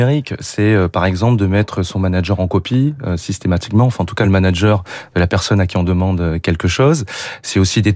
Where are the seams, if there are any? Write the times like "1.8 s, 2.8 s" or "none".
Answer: none